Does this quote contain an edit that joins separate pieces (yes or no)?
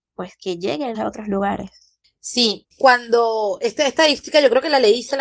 yes